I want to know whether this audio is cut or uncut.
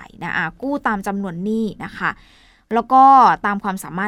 uncut